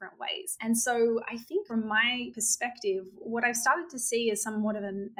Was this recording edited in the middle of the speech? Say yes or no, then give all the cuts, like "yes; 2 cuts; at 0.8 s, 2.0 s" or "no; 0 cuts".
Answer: yes; 1 cut; at 1.7 s